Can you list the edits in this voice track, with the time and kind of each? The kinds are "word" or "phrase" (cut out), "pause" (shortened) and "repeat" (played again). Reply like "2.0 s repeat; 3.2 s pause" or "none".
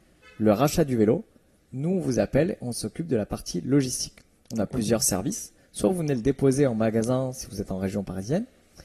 none